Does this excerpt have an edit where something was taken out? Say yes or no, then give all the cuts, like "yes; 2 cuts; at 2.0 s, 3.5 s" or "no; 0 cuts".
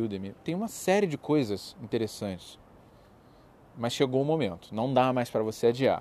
no; 0 cuts